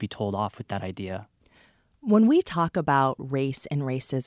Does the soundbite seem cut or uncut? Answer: uncut